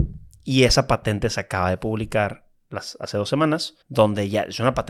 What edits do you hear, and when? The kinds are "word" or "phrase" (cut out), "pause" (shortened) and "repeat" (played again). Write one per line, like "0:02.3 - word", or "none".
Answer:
0:03.8 - pause